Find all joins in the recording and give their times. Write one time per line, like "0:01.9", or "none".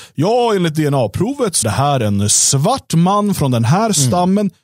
0:01.6